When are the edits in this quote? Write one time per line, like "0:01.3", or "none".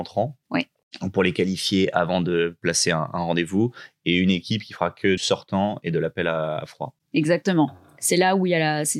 0:05.2